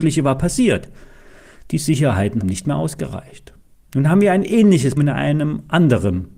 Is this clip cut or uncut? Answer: cut